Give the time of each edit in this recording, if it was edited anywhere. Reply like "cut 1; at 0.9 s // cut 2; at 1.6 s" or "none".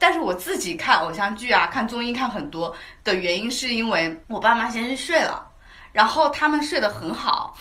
none

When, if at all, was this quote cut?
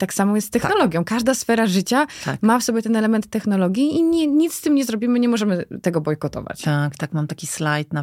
none

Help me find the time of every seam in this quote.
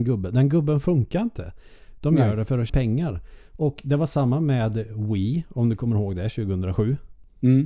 cut 1; at 2.7 s

